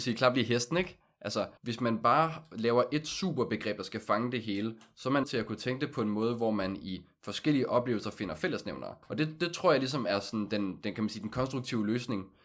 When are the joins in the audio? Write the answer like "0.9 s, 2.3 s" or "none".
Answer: 1.6 s, 5.2 s, 9.0 s